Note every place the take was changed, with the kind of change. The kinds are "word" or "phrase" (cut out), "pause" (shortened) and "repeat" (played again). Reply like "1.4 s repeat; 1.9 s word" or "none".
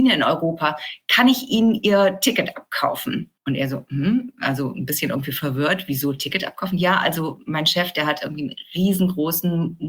3.4 s pause